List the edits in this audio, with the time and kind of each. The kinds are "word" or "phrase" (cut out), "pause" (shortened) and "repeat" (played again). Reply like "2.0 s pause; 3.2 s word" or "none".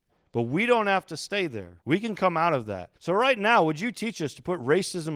1.8 s pause; 3.0 s pause